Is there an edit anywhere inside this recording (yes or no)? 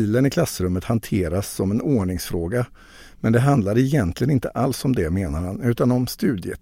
no